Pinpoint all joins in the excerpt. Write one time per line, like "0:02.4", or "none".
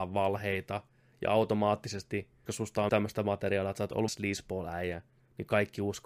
0:02.5
0:02.9
0:04.1